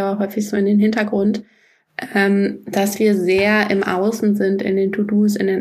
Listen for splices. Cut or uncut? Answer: uncut